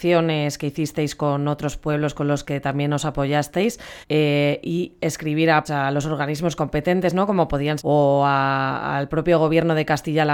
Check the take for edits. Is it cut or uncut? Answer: cut